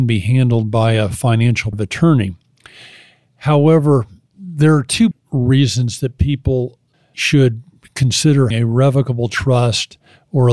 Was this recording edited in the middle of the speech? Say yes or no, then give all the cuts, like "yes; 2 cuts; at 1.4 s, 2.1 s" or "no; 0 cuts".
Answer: yes; 4 cuts; at 1.7 s, 5.1 s, 6.9 s, 8.5 s